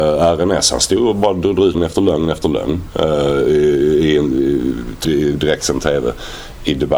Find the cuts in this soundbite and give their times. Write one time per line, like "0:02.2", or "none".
0:01.7
0:05.0